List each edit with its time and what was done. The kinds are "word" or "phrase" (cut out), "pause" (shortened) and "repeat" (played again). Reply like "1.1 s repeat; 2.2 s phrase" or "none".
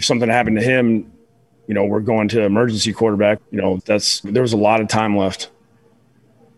3.4 s word; 3.8 s word; 4.2 s word